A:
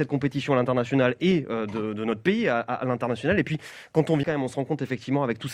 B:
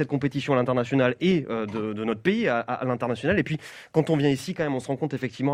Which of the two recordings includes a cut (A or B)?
A